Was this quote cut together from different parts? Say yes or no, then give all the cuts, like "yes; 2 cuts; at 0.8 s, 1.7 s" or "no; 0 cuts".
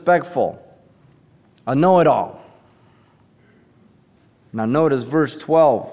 no; 0 cuts